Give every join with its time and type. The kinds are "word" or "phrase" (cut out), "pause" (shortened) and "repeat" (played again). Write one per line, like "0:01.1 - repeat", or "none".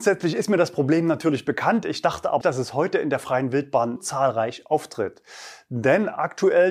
0:02.4 - word
0:04.0 - phrase